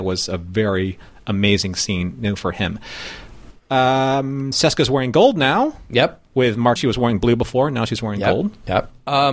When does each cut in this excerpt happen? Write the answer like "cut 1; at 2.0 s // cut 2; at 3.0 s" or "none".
cut 1; at 6.8 s